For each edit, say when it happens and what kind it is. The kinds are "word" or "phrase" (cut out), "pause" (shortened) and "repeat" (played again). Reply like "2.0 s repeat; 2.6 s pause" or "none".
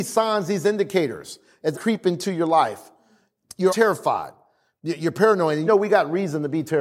1.7 s phrase; 3.7 s word; 5.7 s phrase